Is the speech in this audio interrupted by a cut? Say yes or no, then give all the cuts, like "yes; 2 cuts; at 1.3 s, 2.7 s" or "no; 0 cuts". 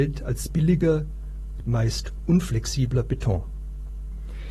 yes; 1 cut; at 1.6 s